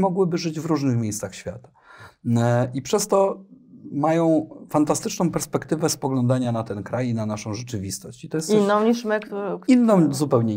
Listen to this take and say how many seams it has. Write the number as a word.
zero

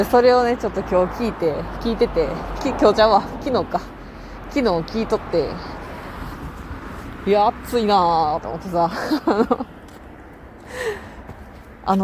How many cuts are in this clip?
one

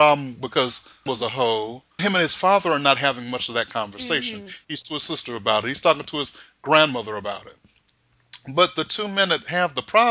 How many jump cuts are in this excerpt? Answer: three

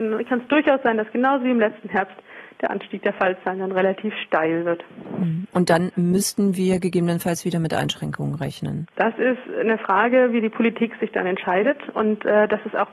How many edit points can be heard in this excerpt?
one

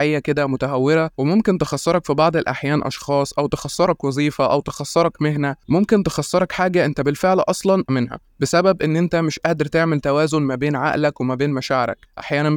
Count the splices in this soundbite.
three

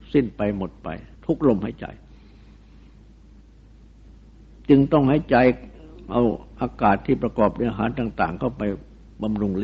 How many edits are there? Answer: one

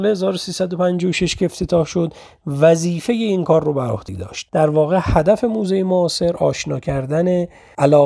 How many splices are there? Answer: zero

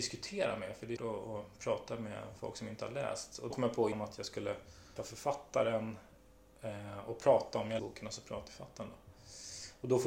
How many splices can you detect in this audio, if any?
six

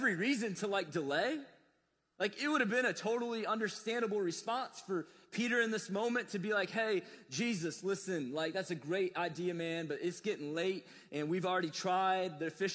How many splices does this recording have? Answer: zero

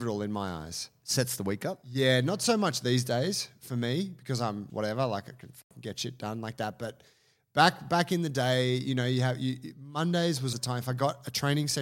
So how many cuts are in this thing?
two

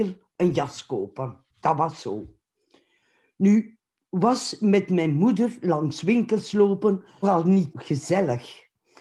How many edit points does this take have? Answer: three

